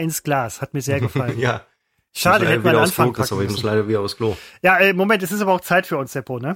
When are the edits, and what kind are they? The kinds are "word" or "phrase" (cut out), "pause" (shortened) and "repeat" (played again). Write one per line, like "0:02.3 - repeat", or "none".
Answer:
none

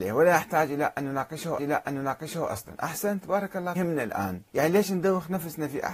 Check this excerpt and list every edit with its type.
0:01.6 - repeat
0:03.7 - phrase
0:04.5 - pause

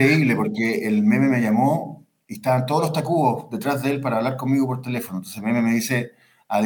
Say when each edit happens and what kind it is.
none

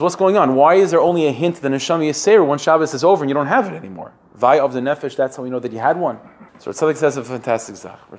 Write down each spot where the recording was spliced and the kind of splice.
0:06.5 - pause

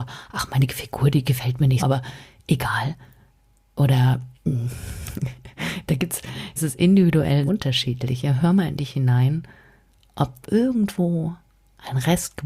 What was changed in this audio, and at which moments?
0:01.8 - word
0:04.4 - pause
0:06.6 - word
0:07.5 - word
0:10.4 - phrase

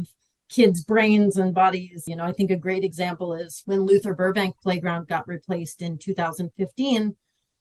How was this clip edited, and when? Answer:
none

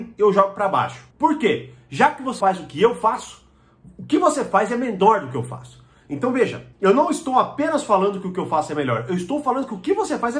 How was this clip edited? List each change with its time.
0:01.1 - pause
0:02.4 - word
0:06.7 - pause

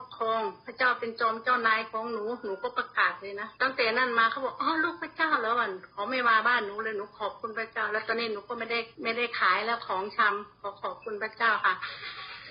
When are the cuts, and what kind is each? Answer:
0:03.5 - pause
0:08.9 - pause

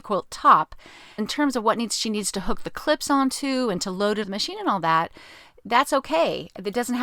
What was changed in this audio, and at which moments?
0:01.2 - word
0:04.2 - word

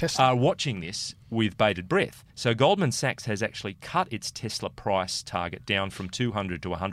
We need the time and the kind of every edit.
0:02.3 - pause

